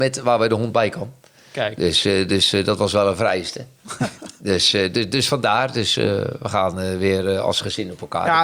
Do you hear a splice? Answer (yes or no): no